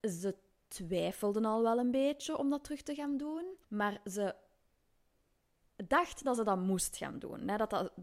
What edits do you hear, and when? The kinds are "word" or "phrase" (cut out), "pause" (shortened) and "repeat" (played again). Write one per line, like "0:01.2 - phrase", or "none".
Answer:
0:03.6 - pause